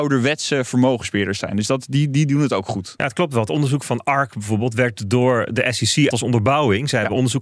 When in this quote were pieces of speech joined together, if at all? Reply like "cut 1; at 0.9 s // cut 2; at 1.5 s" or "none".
cut 1; at 6.1 s